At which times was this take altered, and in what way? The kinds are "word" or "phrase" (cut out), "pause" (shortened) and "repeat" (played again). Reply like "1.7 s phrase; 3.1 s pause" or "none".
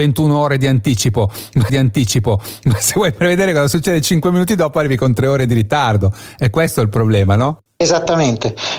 1.7 s repeat; 7.7 s pause

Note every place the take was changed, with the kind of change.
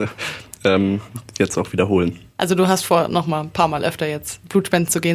2.3 s pause

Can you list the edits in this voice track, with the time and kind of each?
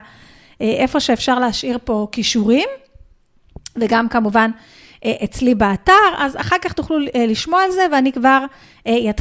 none

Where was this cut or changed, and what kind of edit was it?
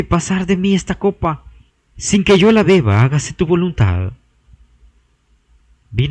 1.7 s pause

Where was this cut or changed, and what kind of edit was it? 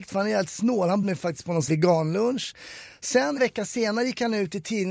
1.0 s word; 1.7 s word; 3.4 s word

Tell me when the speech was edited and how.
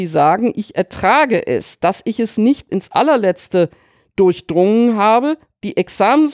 2.7 s word

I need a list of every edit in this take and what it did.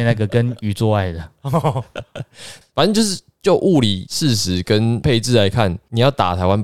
2.6 s word

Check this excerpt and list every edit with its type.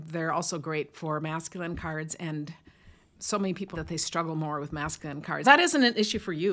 3.1 s word; 3.7 s word; 5.4 s word

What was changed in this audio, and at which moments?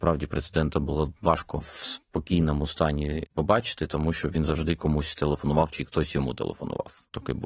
1.2 s pause

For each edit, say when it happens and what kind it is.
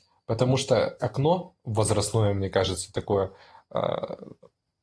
1.0 s word

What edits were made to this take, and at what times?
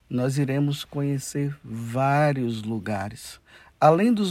none

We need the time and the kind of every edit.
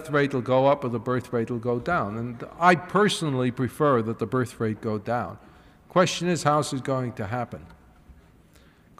none

